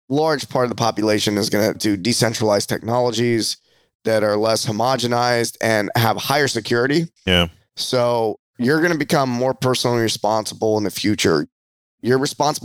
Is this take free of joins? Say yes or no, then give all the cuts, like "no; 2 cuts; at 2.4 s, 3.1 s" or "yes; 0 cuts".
no; 2 cuts; at 1.7 s, 7.2 s